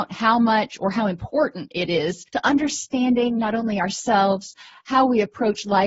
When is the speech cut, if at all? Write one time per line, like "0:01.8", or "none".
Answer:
0:02.3